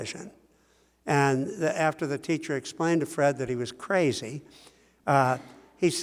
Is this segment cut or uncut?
uncut